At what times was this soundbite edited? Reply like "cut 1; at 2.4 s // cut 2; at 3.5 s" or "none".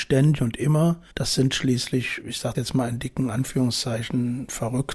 cut 1; at 1.1 s // cut 2; at 2.2 s // cut 3; at 2.5 s

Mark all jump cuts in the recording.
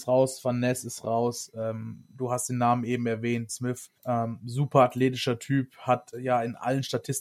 cut 1; at 3.5 s // cut 2; at 4.0 s // cut 3; at 6.1 s

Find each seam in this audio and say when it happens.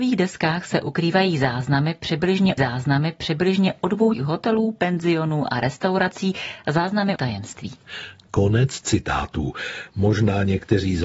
cut 1; at 2.6 s // cut 2; at 4.1 s // cut 3; at 7.2 s

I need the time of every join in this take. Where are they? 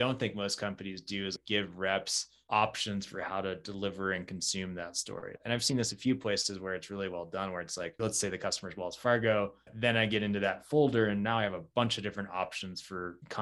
none

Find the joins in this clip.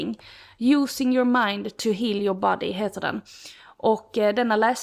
none

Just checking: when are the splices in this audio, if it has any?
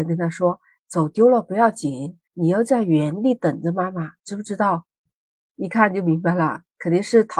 none

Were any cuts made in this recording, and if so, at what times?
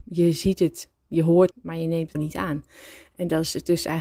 cut 1; at 1.5 s // cut 2; at 2.1 s

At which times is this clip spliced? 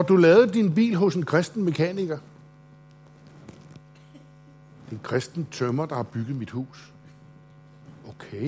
none

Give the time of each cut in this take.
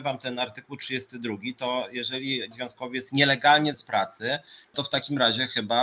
cut 1; at 2.5 s // cut 2; at 3.7 s // cut 3; at 4.7 s

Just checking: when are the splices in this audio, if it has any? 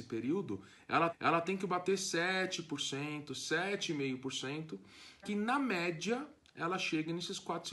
cut 1; at 1.1 s // cut 2; at 5.2 s

